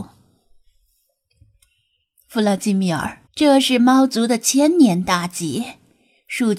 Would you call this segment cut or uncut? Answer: cut